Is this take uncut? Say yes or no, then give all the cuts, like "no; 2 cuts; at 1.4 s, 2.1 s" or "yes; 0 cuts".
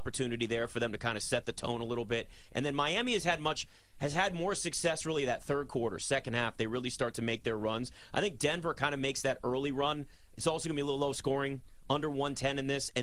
yes; 0 cuts